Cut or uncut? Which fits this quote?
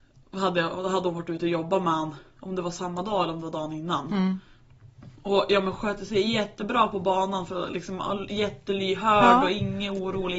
uncut